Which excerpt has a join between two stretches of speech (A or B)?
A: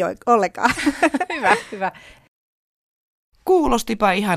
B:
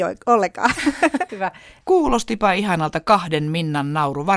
B